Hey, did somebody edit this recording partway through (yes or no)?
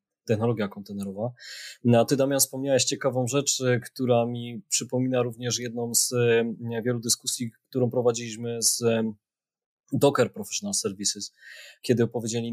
no